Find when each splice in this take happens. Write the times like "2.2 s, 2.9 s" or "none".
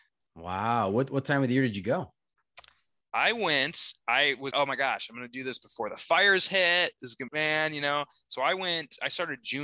4.5 s, 7.3 s